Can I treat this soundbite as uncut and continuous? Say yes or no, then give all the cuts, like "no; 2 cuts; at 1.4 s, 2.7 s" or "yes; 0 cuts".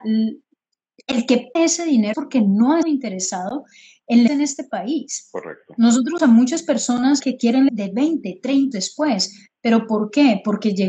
no; 8 cuts; at 1.6 s, 2.1 s, 2.8 s, 4.3 s, 6.2 s, 7.2 s, 7.7 s, 8.7 s